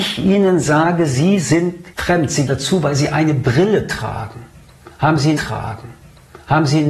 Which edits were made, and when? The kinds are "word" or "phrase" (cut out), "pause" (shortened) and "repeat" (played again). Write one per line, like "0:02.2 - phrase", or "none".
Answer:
0:01.9 - pause
0:02.5 - phrase
0:05.4 - repeat